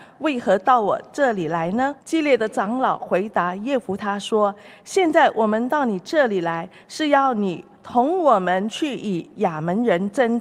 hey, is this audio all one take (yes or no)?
no